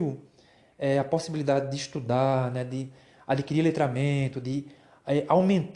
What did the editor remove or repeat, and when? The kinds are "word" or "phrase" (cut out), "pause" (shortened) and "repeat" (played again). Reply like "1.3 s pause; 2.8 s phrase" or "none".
none